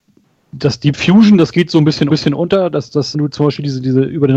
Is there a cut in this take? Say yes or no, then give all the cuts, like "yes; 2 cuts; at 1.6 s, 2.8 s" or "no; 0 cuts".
yes; 2 cuts; at 2.1 s, 3.1 s